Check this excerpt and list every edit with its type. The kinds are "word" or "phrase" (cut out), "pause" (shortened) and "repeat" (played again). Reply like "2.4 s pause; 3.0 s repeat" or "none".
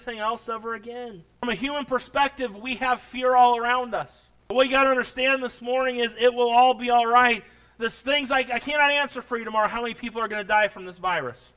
none